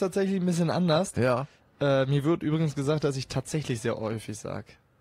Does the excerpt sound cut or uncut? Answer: uncut